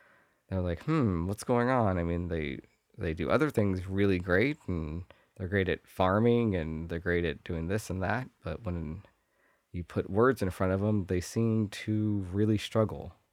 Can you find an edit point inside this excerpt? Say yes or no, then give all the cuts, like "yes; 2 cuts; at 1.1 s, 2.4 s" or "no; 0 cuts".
no; 0 cuts